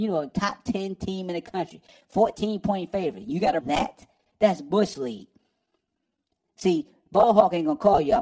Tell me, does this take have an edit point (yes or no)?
yes